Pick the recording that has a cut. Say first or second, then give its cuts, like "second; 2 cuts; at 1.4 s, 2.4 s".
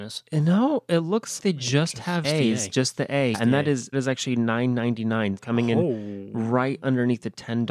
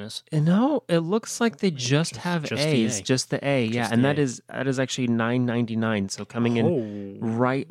first; 5 cuts; at 1.4 s, 2.2 s, 3.3 s, 3.9 s, 5.4 s